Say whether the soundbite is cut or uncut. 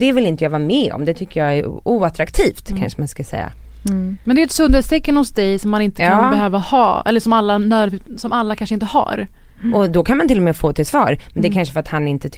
uncut